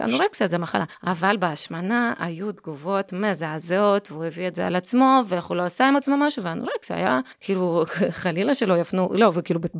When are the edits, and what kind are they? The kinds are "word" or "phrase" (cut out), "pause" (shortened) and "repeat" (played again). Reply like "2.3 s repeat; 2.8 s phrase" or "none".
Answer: 0.9 s pause; 7.3 s pause

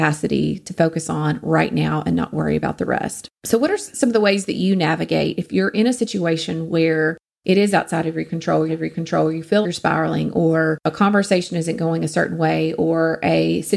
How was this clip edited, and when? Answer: 3.4 s pause; 8.7 s repeat; 9.6 s word

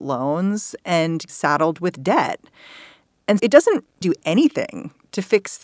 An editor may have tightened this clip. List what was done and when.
1.3 s word; 3.4 s word; 4.0 s word

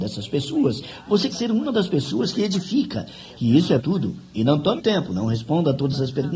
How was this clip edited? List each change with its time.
1.3 s word; 3.8 s word; 4.8 s word

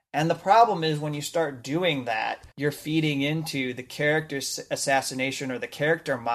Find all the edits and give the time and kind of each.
2.5 s pause

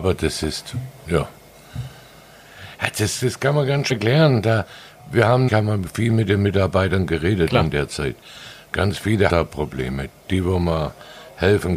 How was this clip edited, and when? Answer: 1.1 s word; 3.9 s word; 5.5 s word; 9.3 s word

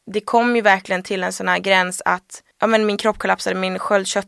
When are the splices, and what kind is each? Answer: 2.5 s pause

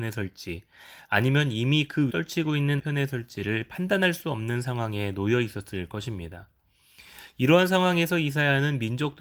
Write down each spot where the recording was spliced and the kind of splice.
2.1 s word; 2.8 s word

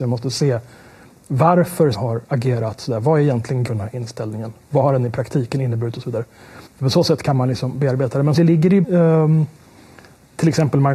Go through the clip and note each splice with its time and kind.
1.9 s word; 2.2 s pause; 3.7 s word; 6.7 s pause; 8.4 s phrase; 8.8 s phrase

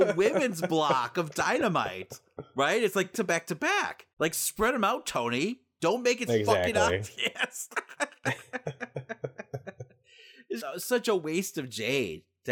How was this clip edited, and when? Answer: 3.1 s word; 4.1 s pause; 6.3 s word; 10.6 s word

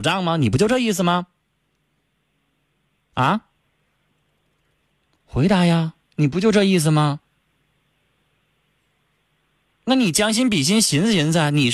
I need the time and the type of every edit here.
none

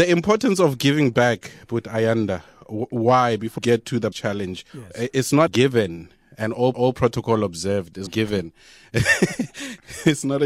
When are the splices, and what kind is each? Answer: 3.6 s word; 4.1 s word; 4.7 s pause; 5.5 s word; 6.7 s repeat; 8.1 s phrase

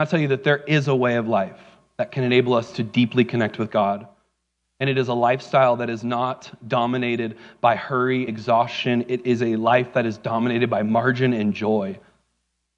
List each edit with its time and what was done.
8.3 s word

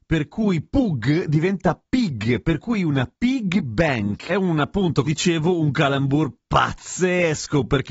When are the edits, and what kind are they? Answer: 3.1 s pause; 4.3 s word; 5.0 s word

